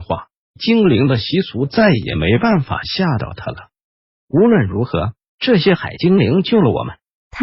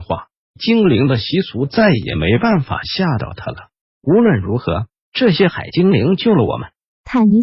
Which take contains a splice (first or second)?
second